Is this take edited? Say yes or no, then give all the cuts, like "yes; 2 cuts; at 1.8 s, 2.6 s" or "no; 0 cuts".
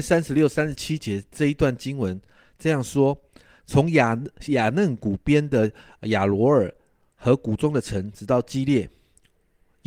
no; 0 cuts